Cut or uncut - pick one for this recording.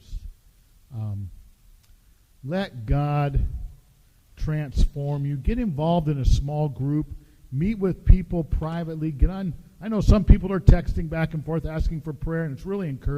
uncut